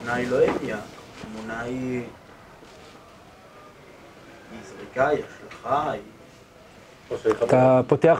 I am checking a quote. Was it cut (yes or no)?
no